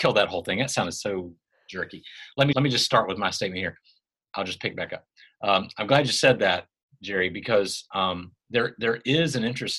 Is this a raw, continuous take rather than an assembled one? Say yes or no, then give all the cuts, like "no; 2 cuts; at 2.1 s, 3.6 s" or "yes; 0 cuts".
no; 1 cut; at 2.5 s